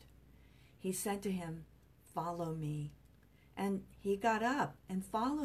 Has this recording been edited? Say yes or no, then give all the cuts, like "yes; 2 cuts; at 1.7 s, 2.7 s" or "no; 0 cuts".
no; 0 cuts